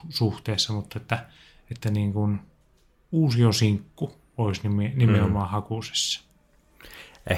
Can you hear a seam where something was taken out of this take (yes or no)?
no